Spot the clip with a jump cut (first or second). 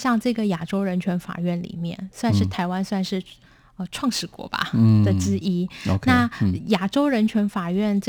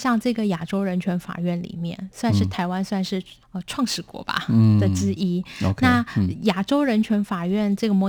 second